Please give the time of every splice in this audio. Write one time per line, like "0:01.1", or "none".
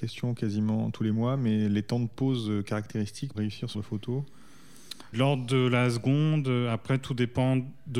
0:03.3
0:03.7
0:05.1

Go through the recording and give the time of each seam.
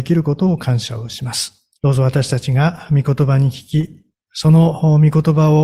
0:01.8
0:04.1

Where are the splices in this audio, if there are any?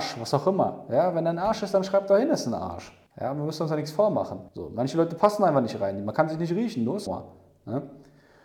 0:03.1
0:04.5
0:07.1

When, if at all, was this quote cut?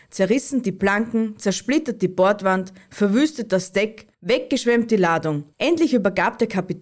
0:04.1
0:05.5

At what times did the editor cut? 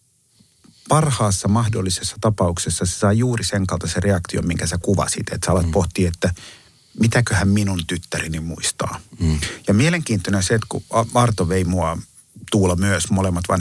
none

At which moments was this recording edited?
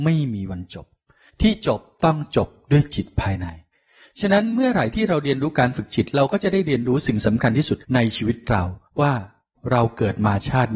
0:07.8
0:08.9

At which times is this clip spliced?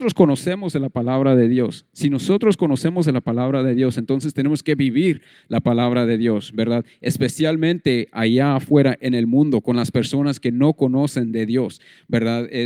none

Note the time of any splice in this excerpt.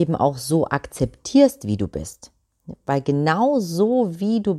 none

